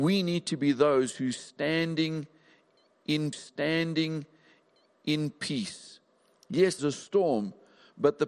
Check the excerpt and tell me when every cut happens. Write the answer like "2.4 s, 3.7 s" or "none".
3.3 s, 6.8 s